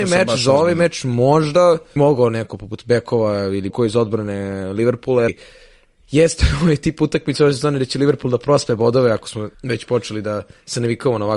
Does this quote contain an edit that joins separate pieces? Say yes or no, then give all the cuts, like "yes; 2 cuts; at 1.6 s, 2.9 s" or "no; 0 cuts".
yes; 4 cuts; at 2.0 s, 3.7 s, 5.3 s, 9.5 s